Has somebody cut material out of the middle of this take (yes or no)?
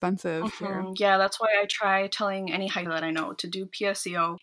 yes